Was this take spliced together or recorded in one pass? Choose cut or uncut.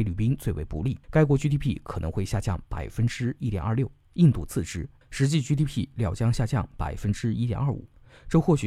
cut